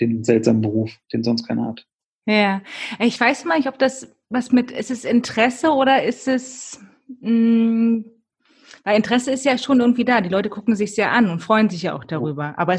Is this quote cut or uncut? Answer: cut